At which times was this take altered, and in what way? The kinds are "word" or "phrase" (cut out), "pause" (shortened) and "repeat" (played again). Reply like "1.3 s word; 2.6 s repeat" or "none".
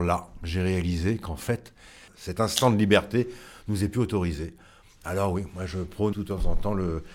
6.1 s word